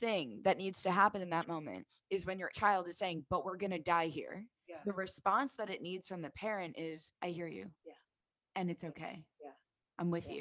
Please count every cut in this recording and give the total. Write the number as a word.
five